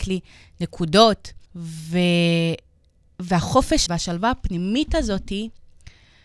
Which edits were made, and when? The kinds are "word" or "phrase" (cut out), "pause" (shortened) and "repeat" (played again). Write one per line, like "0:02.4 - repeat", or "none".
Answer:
0:01.5 - pause
0:03.9 - word